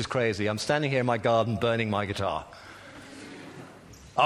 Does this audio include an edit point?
no; 0 cuts

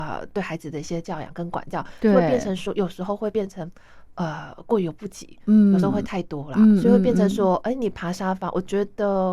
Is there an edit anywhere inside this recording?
no; 0 cuts

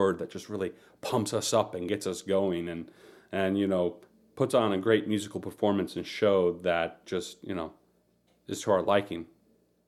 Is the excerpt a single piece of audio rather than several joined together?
yes; 0 cuts

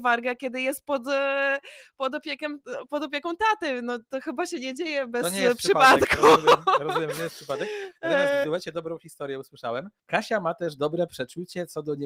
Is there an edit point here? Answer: yes; 2 cuts; at 8.4 s, 10.0 s

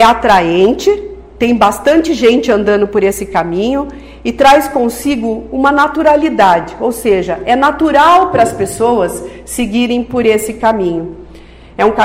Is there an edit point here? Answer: no; 0 cuts

